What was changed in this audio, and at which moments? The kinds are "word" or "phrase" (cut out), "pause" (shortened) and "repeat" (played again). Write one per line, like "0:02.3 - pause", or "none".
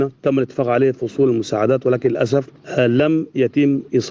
none